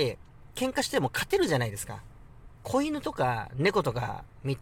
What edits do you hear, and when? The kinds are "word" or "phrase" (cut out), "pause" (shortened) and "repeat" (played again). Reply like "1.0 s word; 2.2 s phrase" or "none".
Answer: 2.5 s pause

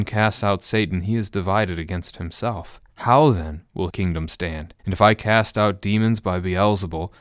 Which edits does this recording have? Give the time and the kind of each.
2.9 s pause; 3.9 s word; 4.8 s pause

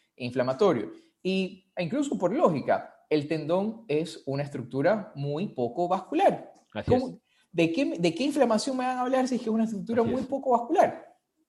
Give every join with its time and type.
none

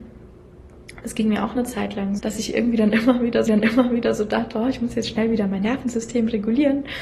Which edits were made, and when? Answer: 2.2 s word; 3.5 s repeat

